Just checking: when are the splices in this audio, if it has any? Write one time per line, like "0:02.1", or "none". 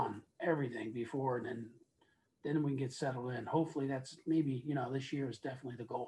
none